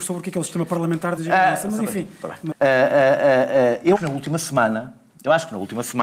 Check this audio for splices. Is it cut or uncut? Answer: cut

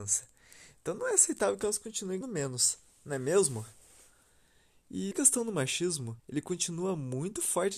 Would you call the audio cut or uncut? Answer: cut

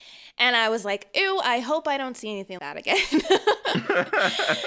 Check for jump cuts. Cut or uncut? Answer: cut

